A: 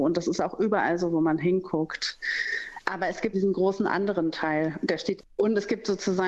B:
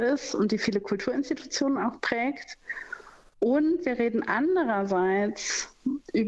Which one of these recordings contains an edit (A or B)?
A